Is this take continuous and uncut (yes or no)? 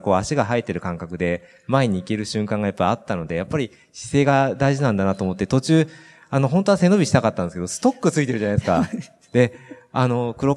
yes